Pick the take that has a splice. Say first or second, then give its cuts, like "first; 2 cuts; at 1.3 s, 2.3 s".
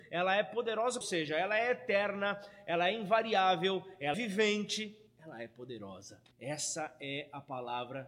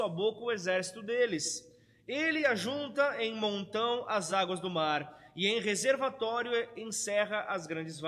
first; 4 cuts; at 1.0 s, 4.1 s, 5.1 s, 6.3 s